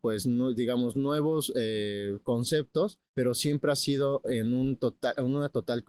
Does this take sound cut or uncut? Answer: cut